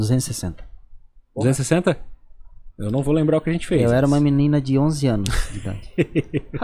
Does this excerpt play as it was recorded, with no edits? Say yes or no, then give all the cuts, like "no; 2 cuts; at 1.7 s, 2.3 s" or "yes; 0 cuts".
yes; 0 cuts